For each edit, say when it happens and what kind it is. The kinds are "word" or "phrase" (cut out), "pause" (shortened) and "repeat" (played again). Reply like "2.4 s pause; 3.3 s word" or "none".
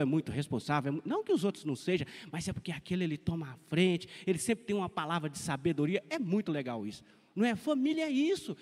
none